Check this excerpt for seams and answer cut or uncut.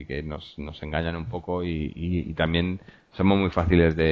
uncut